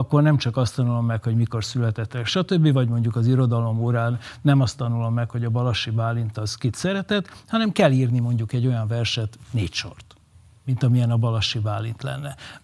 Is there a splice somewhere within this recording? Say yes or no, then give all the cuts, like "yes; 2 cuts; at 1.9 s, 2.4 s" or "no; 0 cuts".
no; 0 cuts